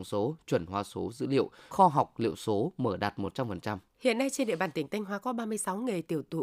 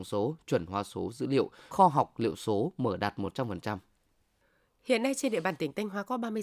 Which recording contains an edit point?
first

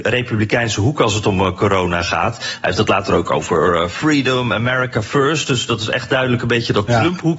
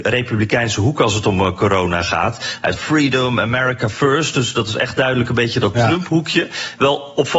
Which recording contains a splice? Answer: second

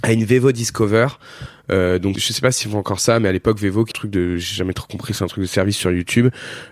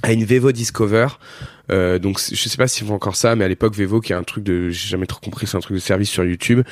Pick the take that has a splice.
first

